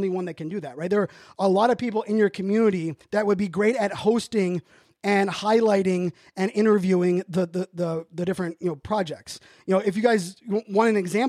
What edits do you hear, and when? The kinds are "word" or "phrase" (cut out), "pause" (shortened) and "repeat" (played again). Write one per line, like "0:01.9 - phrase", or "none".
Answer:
0:03.0 - pause

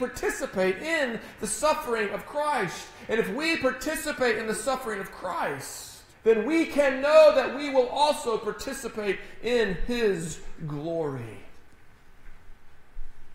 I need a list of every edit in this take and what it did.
0:06.1 - pause

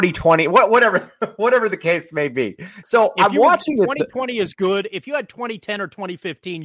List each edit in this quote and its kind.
none

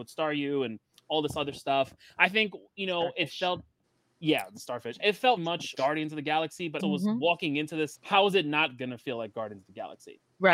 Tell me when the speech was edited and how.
0:05.4 - word
0:05.7 - word
0:06.8 - word
0:08.0 - word

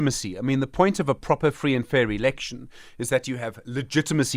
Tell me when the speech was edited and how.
none

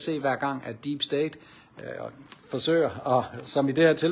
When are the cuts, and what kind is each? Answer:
none

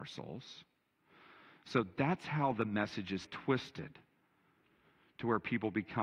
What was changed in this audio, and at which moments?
0:03.2 - word

